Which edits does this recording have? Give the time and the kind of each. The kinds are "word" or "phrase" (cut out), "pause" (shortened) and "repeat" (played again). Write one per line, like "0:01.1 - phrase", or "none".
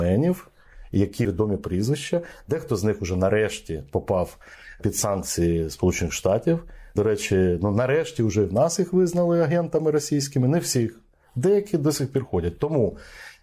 0:01.2 - word